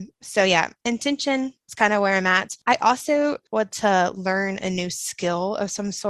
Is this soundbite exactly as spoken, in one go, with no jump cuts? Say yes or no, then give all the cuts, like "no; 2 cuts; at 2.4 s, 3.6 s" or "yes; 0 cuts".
no; 1 cut; at 3.7 s